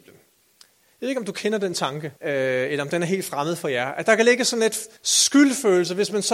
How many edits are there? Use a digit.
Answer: 2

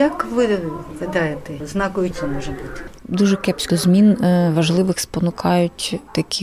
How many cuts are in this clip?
2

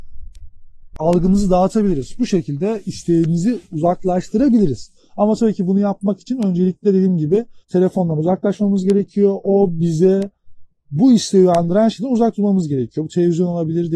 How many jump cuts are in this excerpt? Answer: 1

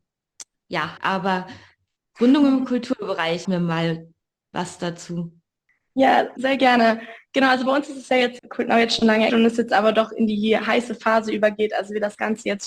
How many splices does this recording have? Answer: 5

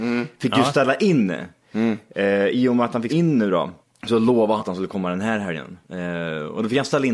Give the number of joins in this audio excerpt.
4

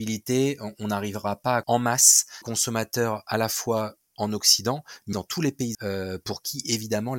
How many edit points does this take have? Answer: 4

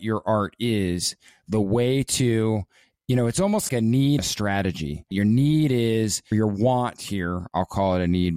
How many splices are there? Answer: 4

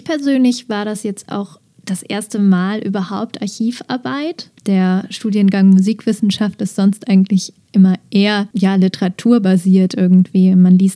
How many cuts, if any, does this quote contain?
2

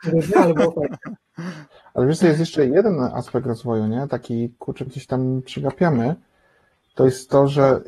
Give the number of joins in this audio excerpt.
1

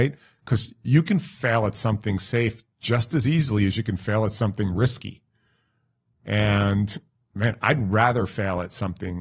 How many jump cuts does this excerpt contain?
0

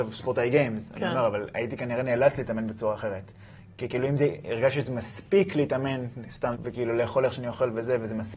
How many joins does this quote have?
1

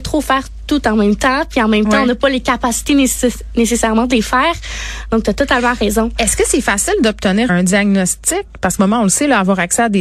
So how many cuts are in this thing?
2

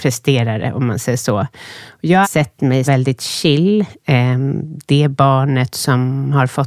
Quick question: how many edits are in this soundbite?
2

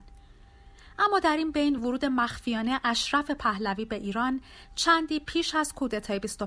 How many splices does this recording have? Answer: 0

